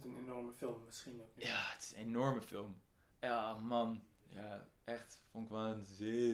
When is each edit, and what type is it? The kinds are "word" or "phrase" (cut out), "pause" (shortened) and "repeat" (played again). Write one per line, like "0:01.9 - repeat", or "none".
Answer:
0:03.1 - pause

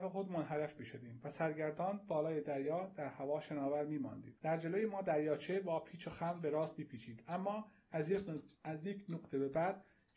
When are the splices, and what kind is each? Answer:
0:04.4 - pause
0:08.5 - pause

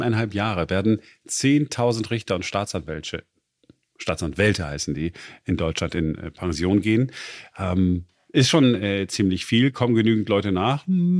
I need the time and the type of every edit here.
none

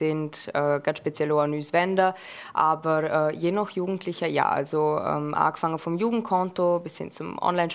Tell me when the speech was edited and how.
none

